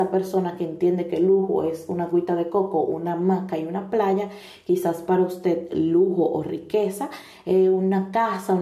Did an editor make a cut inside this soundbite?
no; 0 cuts

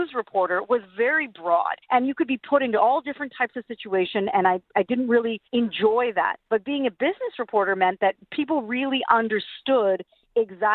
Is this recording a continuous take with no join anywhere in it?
no; 3 cuts; at 1.8 s, 5.5 s, 6.4 s

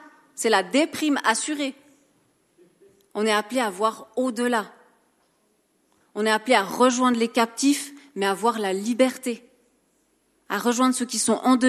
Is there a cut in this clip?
no; 0 cuts

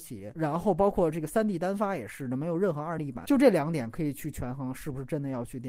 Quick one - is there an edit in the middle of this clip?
no; 0 cuts

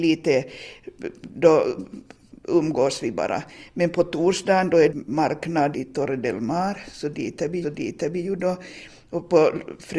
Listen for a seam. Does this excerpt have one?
yes; 3 cuts; at 4.9 s, 5.7 s, 7.6 s

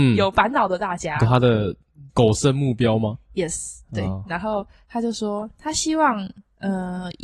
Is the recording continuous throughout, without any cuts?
no; 1 cut; at 2.1 s

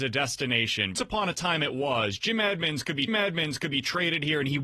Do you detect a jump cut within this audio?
yes; 2 cuts; at 0.9 s, 3.1 s

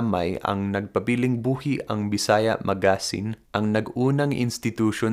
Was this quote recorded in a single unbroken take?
no; 1 cut; at 3.5 s

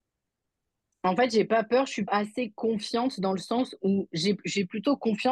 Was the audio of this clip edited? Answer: yes; 1 cut; at 2.1 s

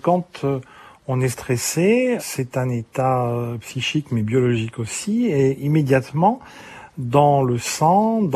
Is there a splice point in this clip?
yes; 1 cut; at 2.2 s

